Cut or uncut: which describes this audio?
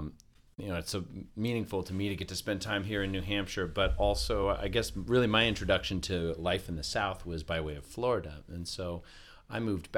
uncut